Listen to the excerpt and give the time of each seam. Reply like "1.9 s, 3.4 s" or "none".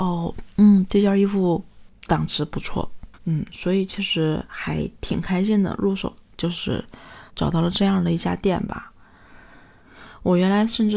2.0 s, 3.1 s, 7.3 s